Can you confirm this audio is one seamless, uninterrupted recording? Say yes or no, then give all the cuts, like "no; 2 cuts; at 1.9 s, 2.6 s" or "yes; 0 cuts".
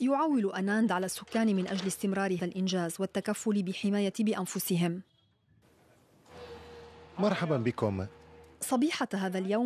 no; 2 cuts; at 2.4 s, 4.1 s